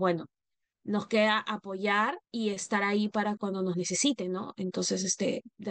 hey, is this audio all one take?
no; 2 cuts; at 2.2 s, 3.4 s

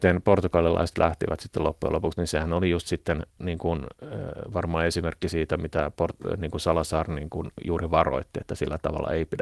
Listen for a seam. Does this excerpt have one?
yes; 1 cut; at 3.3 s

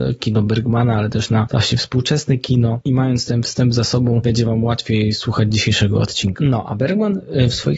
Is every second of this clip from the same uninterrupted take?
yes; 0 cuts

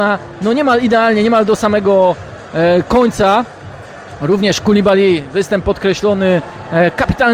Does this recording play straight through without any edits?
yes; 0 cuts

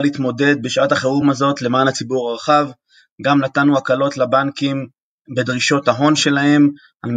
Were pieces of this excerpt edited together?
no; 0 cuts

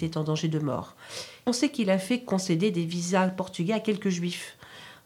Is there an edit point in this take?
yes; 1 cut; at 1.5 s

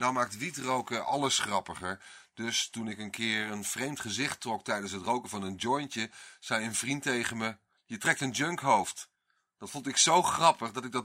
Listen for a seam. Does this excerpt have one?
no; 0 cuts

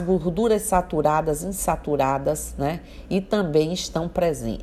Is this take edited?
no; 0 cuts

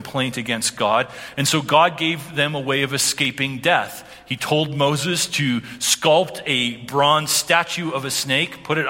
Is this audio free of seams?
yes; 0 cuts

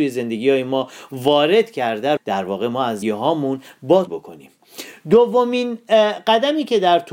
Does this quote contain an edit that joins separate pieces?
yes; 3 cuts; at 2.2 s, 3.0 s, 4.1 s

